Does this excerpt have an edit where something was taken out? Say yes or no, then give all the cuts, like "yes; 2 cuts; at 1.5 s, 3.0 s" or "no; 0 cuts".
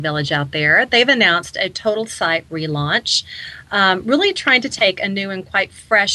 no; 0 cuts